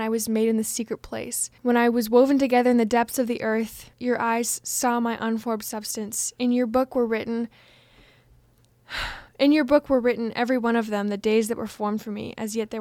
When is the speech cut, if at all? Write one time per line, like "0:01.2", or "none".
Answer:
0:01.6
0:03.9
0:09.3